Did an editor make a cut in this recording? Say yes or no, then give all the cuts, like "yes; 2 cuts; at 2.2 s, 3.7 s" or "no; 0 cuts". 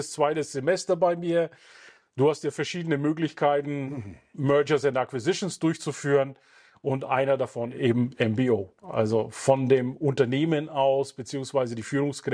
no; 0 cuts